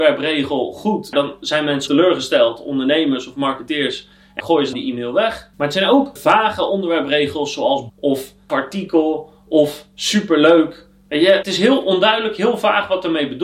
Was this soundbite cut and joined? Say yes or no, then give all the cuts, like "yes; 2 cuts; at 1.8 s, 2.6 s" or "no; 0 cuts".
yes; 8 cuts; at 1.1 s, 1.9 s, 4.4 s, 4.7 s, 6.2 s, 7.9 s, 8.5 s, 11.4 s